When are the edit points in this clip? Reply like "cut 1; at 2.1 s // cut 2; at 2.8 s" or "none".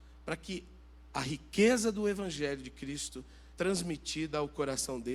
cut 1; at 3.5 s